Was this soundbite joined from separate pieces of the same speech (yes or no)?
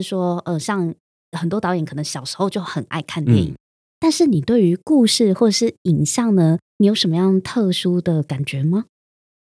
no